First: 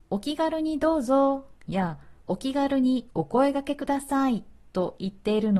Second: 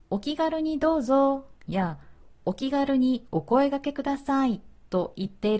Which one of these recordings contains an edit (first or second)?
first